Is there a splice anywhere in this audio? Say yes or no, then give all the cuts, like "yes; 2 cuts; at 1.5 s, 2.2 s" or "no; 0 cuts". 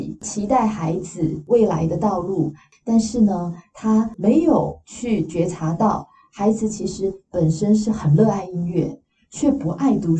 no; 0 cuts